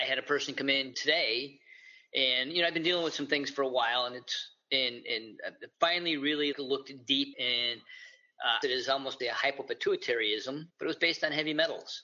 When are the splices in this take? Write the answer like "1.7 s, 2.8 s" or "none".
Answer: 0.9 s, 4.6 s, 5.7 s, 6.5 s, 7.3 s, 8.6 s, 9.2 s, 10.7 s